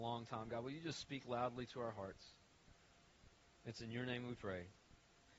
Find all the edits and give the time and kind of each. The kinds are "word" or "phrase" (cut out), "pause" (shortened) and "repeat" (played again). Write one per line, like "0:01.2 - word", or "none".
none

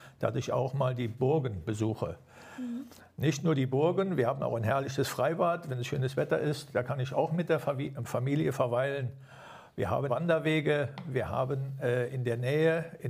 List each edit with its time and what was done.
0:10.1 - word

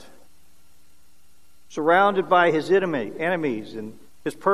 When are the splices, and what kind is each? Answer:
none

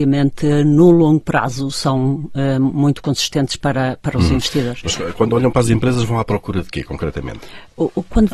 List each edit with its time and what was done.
none

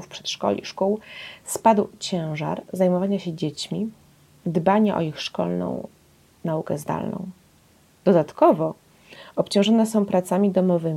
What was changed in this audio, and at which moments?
none

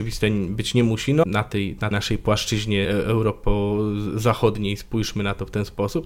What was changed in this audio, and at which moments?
0:01.2 - word
0:01.9 - word
0:02.8 - word

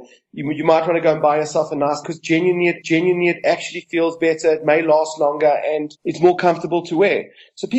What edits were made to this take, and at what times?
0:02.0 - phrase
0:02.8 - repeat
0:05.9 - pause

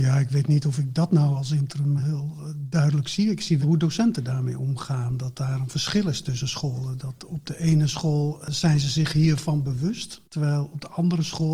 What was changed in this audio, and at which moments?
0:02.0 - word
0:03.6 - word
0:10.2 - pause

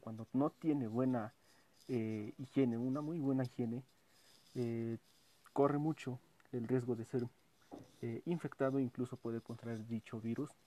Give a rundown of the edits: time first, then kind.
none

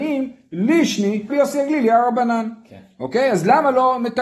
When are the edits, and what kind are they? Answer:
0:01.3 - word

